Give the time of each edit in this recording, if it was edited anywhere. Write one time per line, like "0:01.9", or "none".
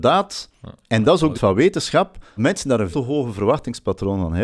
0:01.3
0:02.4
0:02.9